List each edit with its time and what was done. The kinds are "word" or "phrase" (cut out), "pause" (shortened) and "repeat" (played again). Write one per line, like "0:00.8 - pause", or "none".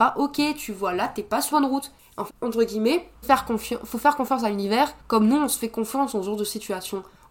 0:01.5 - word
0:02.3 - phrase
0:03.2 - word
0:05.0 - pause